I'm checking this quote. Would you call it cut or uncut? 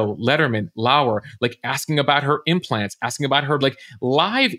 cut